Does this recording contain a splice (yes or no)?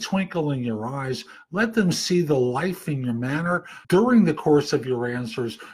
yes